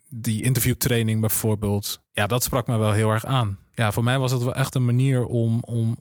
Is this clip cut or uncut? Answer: uncut